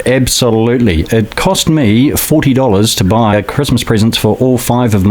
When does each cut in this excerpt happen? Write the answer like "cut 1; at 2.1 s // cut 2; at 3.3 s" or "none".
cut 1; at 3.3 s